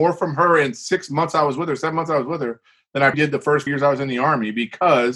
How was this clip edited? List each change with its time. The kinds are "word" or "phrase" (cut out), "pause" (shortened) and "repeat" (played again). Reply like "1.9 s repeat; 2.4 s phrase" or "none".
3.1 s word; 3.7 s word